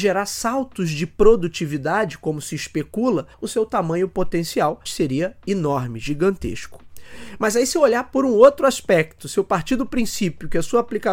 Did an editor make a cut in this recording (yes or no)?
yes